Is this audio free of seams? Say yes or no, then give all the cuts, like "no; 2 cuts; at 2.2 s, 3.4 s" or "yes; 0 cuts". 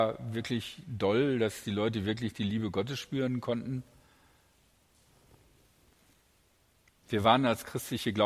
yes; 0 cuts